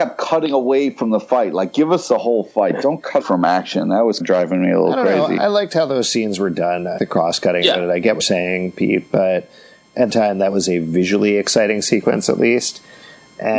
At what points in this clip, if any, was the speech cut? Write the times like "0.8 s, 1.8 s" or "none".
3.2 s, 4.2 s, 7.0 s, 8.2 s, 10.1 s